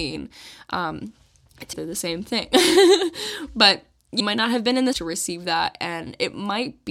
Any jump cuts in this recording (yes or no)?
yes